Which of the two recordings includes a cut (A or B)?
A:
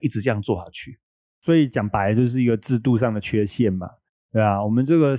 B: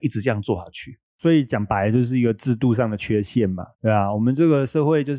B